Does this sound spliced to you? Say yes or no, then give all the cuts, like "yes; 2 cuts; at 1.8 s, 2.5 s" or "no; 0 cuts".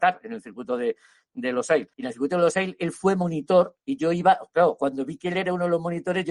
yes; 1 cut; at 1.9 s